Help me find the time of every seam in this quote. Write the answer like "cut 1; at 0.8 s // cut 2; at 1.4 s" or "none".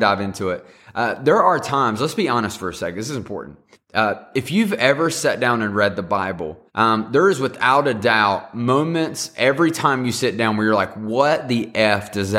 cut 1; at 3.7 s // cut 2; at 6.7 s